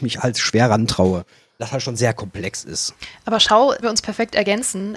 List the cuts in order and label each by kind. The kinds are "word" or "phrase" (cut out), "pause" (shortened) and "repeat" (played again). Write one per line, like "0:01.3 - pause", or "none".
0:01.6 - word
0:02.0 - word
0:03.8 - phrase